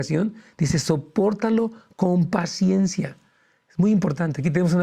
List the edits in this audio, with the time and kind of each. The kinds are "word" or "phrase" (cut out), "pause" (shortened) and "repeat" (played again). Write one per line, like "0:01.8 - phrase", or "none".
none